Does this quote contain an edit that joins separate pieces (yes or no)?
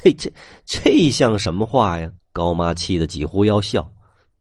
yes